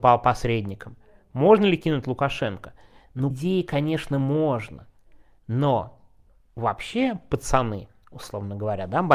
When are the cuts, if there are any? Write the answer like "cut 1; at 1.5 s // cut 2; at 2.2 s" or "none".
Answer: cut 1; at 3.3 s